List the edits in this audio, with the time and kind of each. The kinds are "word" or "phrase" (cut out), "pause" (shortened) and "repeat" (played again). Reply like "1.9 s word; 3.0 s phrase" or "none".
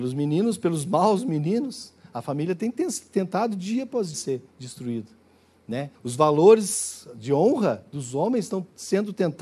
4.1 s word; 5.9 s pause